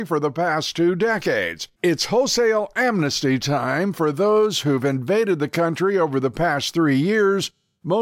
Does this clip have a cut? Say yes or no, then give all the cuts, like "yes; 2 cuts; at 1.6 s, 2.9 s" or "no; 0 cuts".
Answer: yes; 1 cut; at 1.7 s